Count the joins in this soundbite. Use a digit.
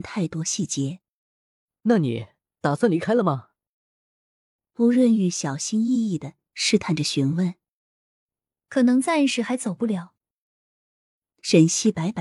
0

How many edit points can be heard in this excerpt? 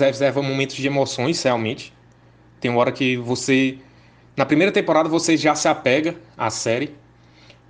0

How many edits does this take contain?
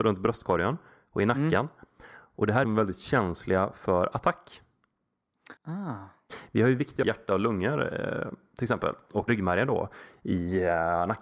4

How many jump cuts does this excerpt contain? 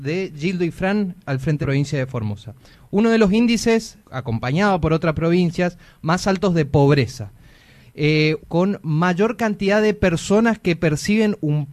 3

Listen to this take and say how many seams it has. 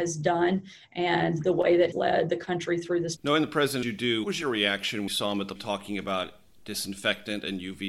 6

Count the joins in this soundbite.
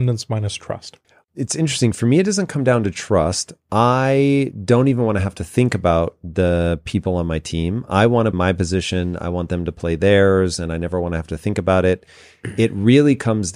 2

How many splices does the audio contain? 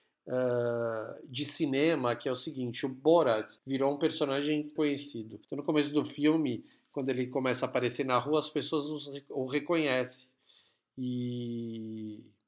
3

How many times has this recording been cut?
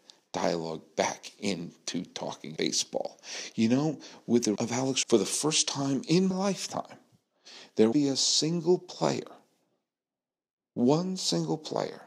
5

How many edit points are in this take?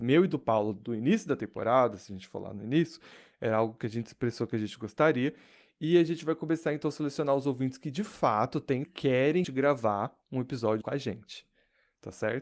3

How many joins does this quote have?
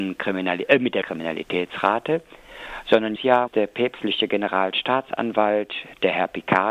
3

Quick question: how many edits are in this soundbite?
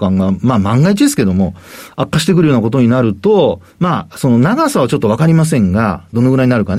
1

